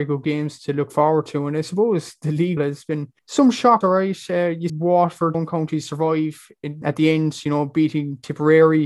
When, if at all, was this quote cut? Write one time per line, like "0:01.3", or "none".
0:02.6
0:03.2
0:03.8
0:04.7
0:05.3
0:06.8